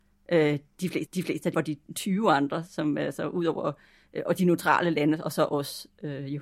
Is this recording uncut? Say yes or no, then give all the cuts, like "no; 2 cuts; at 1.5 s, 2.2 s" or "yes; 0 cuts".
no; 3 cuts; at 1.1 s, 1.5 s, 1.8 s